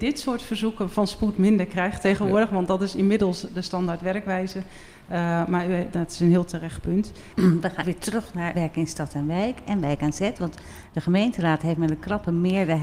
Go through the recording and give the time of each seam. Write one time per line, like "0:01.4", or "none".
0:07.8
0:08.5